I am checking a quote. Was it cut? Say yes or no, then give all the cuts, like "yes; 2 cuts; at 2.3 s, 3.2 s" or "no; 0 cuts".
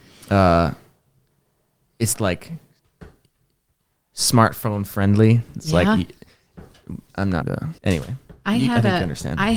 yes; 4 cuts; at 2.1 s, 7.1 s, 7.4 s, 7.8 s